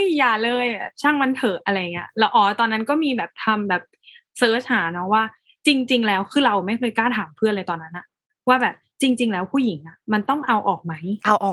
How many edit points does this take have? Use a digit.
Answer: 0